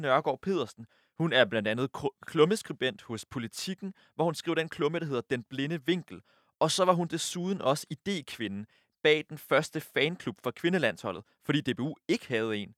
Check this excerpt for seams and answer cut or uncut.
uncut